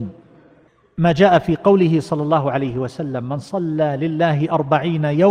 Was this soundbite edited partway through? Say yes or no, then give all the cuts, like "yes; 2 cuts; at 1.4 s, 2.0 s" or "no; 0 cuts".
no; 0 cuts